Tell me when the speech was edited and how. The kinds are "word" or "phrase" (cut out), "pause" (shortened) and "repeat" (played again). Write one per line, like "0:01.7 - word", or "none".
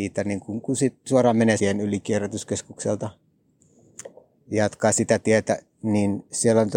0:01.6 - phrase